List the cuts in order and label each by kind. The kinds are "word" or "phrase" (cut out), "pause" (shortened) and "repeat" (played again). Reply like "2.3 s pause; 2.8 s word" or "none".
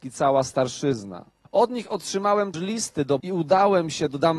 1.4 s pause; 2.5 s word; 3.2 s word